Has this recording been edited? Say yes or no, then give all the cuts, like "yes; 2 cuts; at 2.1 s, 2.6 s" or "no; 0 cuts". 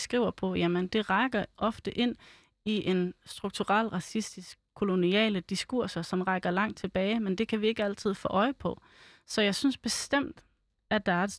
no; 0 cuts